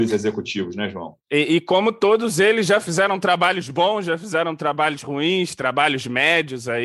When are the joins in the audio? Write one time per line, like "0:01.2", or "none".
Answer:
0:01.2

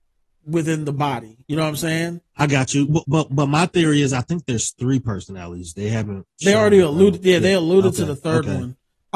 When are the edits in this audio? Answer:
0:01.4
0:03.0

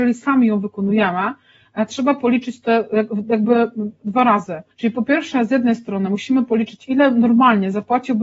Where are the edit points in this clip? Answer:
0:04.7

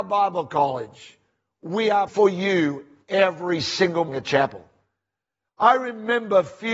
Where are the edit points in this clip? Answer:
0:02.1
0:04.1

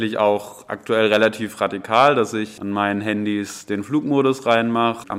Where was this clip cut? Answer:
none

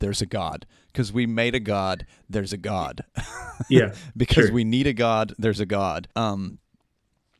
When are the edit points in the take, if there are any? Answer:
0:06.1

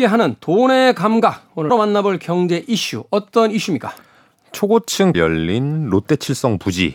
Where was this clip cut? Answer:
0:01.7
0:05.1

